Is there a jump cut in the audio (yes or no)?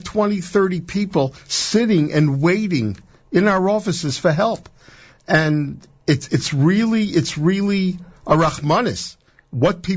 no